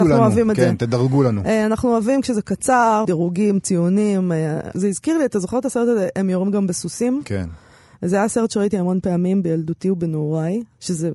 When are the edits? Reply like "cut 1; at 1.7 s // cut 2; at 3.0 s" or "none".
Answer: cut 1; at 3.0 s // cut 2; at 4.7 s